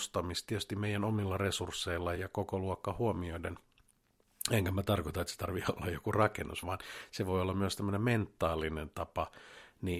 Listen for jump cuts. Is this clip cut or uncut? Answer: cut